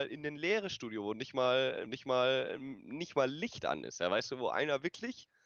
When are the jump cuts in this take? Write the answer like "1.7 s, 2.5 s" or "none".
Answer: 1.9 s